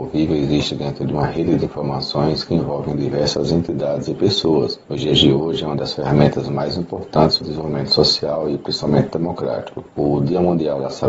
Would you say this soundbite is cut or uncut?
cut